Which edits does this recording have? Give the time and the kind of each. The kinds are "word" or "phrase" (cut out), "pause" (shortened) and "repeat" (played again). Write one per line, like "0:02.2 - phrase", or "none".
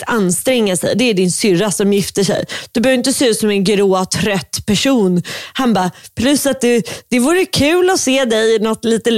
none